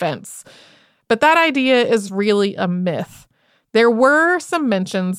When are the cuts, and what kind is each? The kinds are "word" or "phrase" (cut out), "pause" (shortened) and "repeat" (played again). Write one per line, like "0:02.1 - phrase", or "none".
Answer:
none